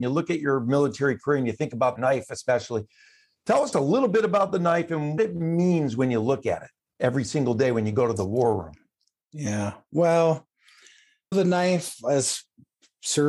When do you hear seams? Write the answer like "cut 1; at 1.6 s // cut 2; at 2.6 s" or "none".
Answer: cut 1; at 2.0 s // cut 2; at 3.7 s // cut 3; at 5.2 s // cut 4; at 11.3 s